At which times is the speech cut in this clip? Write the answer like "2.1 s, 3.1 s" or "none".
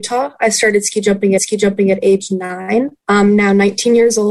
1.4 s, 3.0 s